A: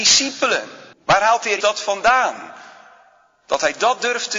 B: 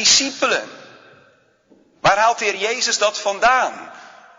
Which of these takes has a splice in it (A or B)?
A